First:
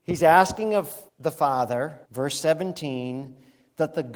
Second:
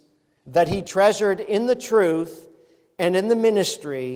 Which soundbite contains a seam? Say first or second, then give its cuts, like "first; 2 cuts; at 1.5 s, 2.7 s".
first; 2 cuts; at 1.1 s, 2.0 s